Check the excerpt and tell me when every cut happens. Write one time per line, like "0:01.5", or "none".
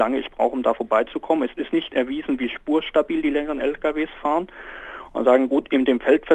none